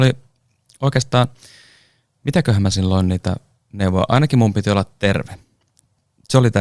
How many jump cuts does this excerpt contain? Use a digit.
1